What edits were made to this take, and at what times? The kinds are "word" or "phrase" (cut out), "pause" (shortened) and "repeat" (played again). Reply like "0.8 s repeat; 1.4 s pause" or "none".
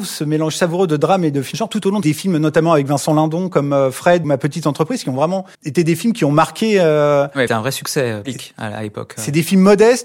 1.5 s word; 2.0 s phrase; 4.2 s word; 5.5 s pause; 7.5 s phrase; 8.2 s word

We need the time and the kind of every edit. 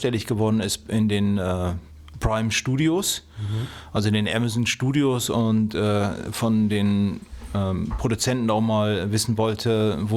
none

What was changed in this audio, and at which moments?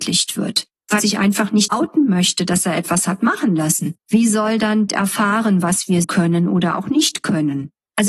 1.0 s word; 1.7 s word; 4.9 s phrase; 6.0 s word

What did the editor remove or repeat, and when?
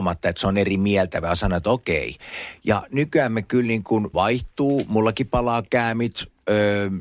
4.1 s word

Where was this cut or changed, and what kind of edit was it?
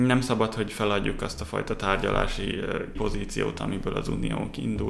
3.0 s word

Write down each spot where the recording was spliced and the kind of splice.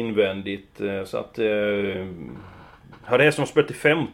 none

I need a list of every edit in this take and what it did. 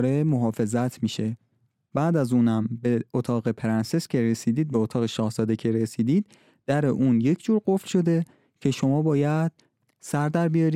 none

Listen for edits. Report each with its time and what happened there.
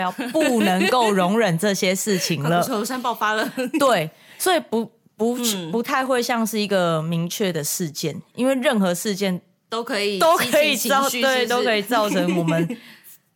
none

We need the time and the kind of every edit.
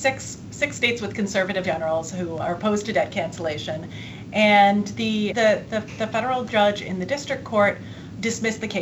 1.6 s word; 2.4 s word; 5.3 s word

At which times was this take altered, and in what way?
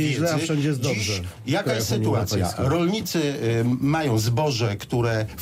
none

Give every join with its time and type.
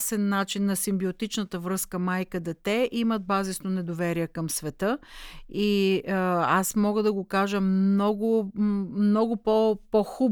none

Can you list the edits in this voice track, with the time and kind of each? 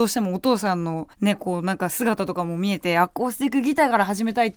1.1 s pause

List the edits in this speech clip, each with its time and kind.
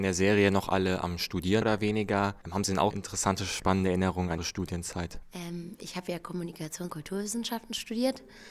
1.6 s word; 2.4 s pause; 2.9 s word; 4.4 s word; 6.9 s word

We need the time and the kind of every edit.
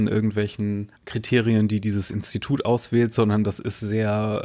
1.0 s pause

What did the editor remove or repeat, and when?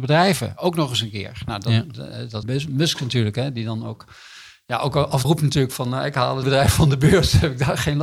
2.4 s phrase; 5.2 s word; 6.4 s word

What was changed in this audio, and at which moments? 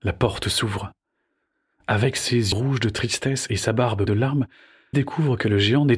2.5 s word; 4.1 s word; 4.9 s word

